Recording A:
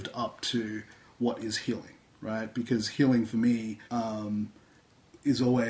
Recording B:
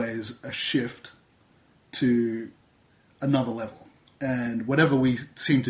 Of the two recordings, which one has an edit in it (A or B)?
A